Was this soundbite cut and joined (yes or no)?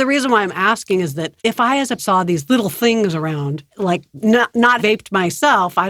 yes